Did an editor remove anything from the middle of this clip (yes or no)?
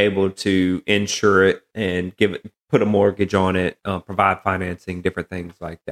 no